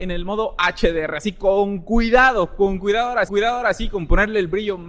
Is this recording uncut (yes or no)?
no